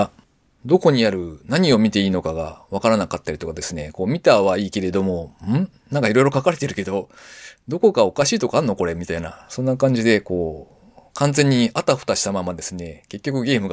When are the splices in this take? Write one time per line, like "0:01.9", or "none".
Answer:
none